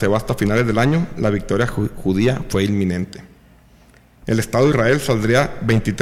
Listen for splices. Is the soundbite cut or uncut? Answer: uncut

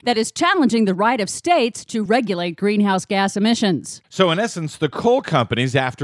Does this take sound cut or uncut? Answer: uncut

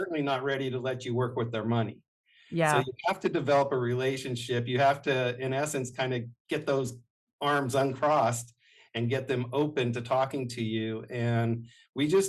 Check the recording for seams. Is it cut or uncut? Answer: uncut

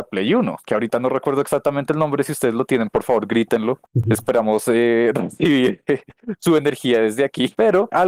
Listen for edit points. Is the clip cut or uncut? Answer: uncut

